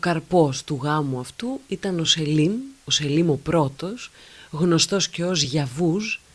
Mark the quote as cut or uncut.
uncut